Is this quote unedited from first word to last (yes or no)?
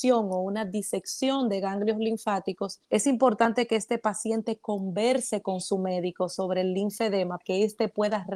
no